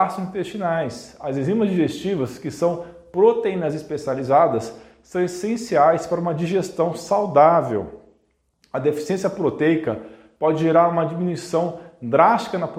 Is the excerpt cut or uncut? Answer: uncut